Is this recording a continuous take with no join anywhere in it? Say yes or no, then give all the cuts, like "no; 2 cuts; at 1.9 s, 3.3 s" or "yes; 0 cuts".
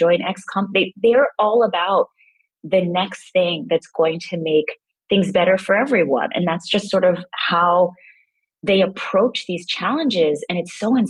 yes; 0 cuts